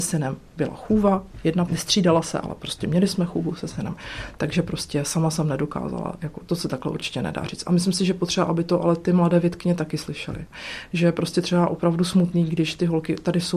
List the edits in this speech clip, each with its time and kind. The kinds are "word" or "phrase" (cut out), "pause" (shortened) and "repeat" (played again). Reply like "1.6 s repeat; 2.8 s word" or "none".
1.7 s phrase